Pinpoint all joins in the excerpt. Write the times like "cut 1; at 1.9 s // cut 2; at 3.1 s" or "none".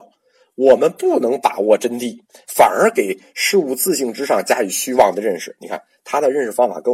cut 1; at 2.3 s